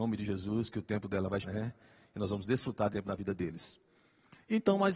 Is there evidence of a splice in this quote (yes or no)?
yes